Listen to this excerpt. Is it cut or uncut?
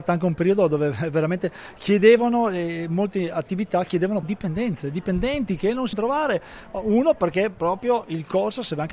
cut